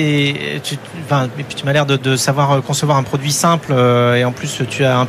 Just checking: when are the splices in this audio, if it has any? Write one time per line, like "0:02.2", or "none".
none